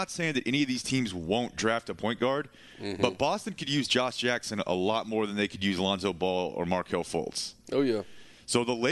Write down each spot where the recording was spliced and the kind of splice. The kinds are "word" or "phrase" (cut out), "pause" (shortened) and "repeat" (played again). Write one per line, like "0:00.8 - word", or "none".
none